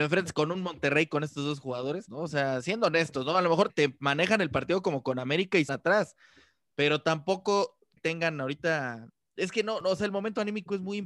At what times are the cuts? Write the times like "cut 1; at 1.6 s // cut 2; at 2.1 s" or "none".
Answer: cut 1; at 2.1 s // cut 2; at 3.7 s // cut 3; at 5.7 s // cut 4; at 8.0 s